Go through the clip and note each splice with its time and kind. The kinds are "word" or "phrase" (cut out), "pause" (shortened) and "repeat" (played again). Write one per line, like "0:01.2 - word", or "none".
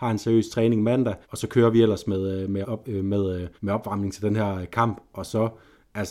0:01.2 - pause
0:02.6 - word
0:03.6 - pause